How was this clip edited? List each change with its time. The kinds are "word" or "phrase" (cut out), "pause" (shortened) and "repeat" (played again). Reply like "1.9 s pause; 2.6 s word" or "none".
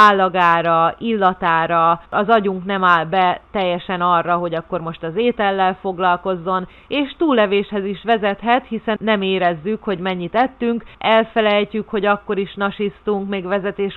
2.1 s pause; 9.0 s word; 10.9 s pause